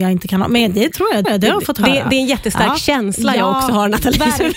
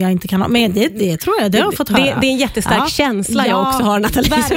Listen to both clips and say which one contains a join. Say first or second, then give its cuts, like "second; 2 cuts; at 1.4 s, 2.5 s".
first; 2 cuts; at 0.9 s, 1.2 s